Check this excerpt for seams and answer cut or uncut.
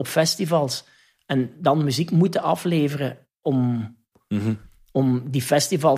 uncut